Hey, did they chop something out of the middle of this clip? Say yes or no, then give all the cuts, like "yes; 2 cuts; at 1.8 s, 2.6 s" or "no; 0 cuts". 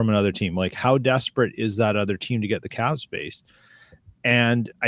no; 0 cuts